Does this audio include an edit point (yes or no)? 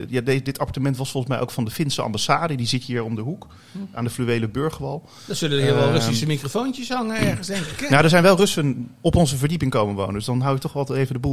no